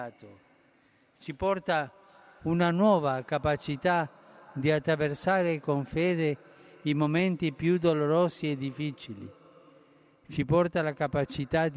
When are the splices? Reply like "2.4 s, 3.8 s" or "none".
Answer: none